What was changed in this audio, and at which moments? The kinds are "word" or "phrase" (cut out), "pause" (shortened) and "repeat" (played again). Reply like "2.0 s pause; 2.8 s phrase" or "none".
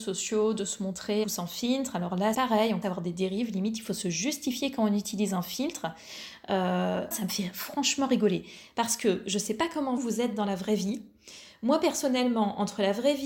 1.2 s word; 2.3 s word; 2.8 s word; 7.1 s word; 10.0 s word